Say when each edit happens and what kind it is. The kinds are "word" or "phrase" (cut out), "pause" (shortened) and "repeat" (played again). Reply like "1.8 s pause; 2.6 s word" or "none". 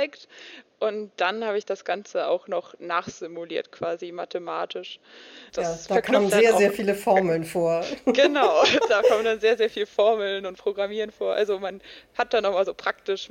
5.5 s pause; 6.3 s word